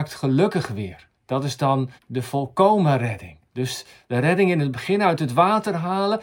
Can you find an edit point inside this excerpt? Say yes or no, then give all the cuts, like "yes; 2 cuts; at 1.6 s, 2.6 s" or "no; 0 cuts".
yes; 3 cuts; at 1.2 s, 2.0 s, 3.5 s